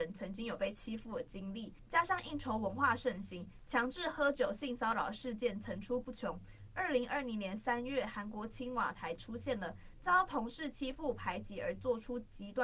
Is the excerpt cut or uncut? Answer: uncut